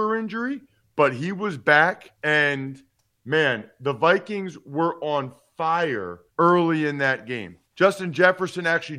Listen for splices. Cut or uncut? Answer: cut